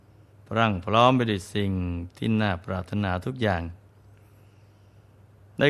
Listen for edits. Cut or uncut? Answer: uncut